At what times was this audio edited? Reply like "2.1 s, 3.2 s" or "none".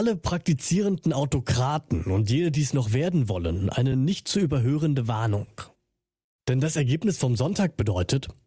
none